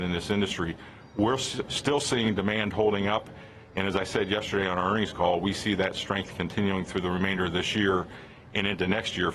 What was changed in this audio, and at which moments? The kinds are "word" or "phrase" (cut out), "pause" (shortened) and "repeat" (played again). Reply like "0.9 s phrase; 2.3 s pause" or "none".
none